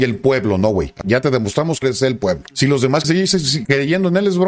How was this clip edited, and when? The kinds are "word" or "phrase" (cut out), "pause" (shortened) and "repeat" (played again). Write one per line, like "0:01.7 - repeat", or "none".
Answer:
0:01.0 - word
0:01.8 - word
0:03.0 - word